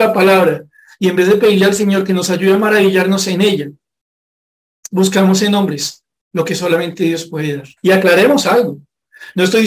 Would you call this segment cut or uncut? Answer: cut